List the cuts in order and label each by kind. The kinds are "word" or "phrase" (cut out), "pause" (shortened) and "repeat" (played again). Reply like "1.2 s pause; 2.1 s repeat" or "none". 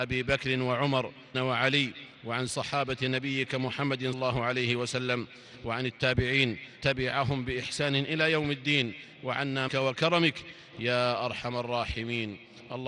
1.3 s word; 2.5 s word; 4.1 s word; 6.8 s word; 9.7 s phrase